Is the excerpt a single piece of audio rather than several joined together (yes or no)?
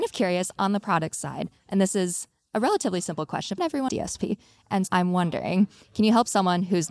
no